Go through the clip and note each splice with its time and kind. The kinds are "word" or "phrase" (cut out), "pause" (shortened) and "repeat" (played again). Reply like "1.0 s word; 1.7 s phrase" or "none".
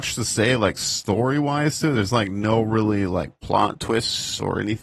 none